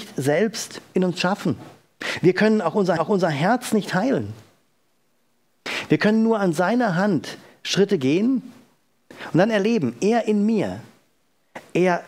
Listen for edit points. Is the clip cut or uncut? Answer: cut